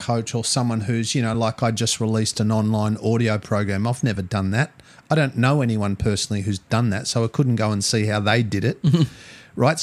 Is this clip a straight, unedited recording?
yes; 0 cuts

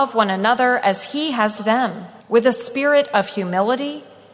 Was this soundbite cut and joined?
yes; 2 cuts; at 1.6 s, 2.2 s

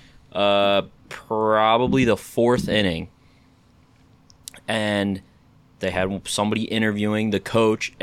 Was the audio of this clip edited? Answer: yes; 1 cut; at 5.5 s

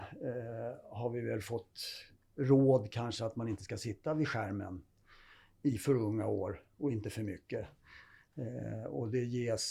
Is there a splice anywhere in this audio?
no; 0 cuts

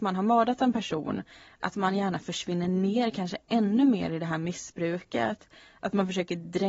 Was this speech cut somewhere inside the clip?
no; 0 cuts

